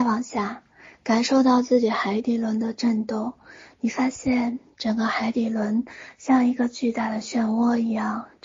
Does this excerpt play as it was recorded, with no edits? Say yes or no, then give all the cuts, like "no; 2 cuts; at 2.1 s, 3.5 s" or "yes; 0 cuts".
yes; 0 cuts